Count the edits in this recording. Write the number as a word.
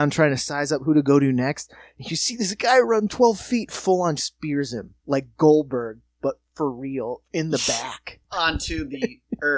two